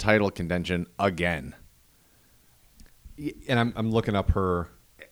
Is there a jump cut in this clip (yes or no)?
no